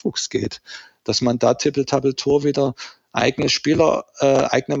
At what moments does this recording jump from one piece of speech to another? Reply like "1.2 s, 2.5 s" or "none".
none